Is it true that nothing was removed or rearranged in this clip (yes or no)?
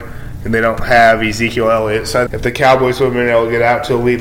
no